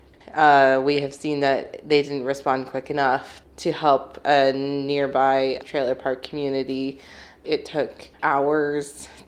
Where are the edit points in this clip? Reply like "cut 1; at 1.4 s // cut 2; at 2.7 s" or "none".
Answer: none